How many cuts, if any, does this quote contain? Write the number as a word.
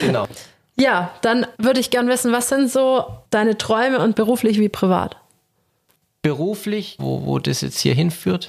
four